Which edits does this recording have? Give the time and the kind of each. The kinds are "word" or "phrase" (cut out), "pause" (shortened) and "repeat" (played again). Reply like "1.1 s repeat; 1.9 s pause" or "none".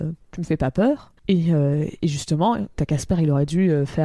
1.2 s pause